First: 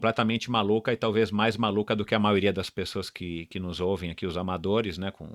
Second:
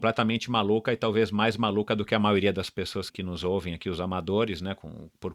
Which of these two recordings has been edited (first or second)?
second